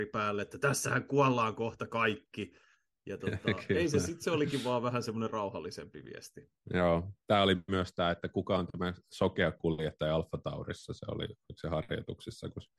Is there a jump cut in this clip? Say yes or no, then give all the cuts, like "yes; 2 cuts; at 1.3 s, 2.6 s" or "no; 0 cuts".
no; 0 cuts